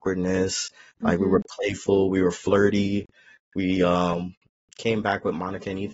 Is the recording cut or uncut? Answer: uncut